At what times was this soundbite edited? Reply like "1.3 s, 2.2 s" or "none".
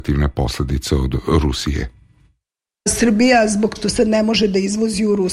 3.8 s